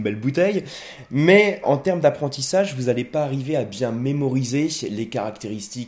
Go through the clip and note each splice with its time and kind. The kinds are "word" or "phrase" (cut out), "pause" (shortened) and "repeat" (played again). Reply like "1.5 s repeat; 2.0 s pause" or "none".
1.6 s word

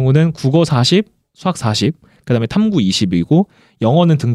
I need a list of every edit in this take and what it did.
none

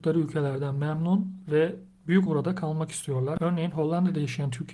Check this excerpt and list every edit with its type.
2.3 s word

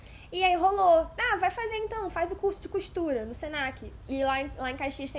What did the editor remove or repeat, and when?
none

